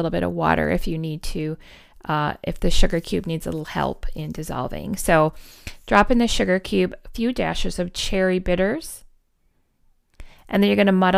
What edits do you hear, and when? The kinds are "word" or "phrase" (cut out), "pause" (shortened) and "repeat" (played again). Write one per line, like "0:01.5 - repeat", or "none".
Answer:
none